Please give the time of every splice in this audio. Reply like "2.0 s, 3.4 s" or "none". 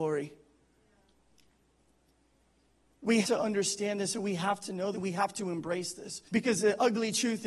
3.2 s, 4.9 s, 6.3 s